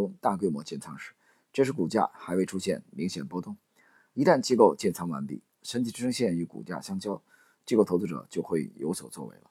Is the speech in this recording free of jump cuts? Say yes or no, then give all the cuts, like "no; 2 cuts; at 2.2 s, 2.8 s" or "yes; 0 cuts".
yes; 0 cuts